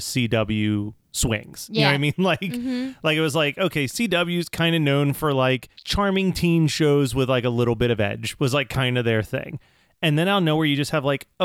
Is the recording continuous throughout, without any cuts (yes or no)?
yes